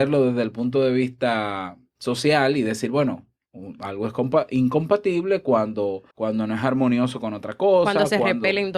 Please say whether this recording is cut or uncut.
cut